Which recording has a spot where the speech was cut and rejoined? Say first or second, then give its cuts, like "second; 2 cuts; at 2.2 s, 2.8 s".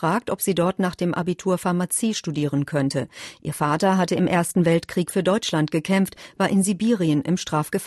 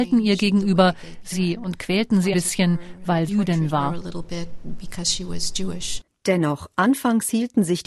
second; 3 cuts; at 1.3 s, 2.3 s, 3.3 s